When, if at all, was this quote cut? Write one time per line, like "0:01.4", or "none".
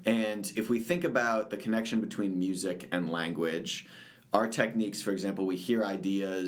none